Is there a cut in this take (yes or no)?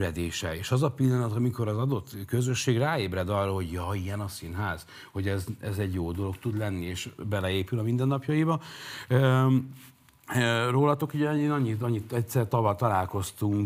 no